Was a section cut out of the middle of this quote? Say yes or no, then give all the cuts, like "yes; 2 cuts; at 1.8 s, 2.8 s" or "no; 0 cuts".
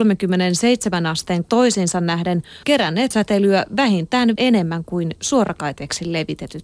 yes; 4 cuts; at 1.4 s, 2.6 s, 3.1 s, 4.4 s